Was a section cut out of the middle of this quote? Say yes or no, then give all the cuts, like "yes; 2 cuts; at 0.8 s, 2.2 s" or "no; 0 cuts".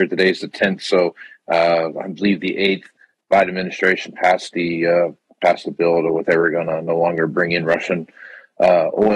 no; 0 cuts